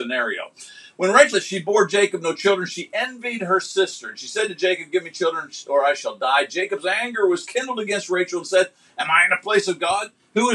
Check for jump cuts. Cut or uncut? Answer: cut